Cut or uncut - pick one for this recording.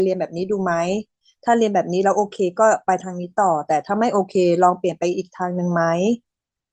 uncut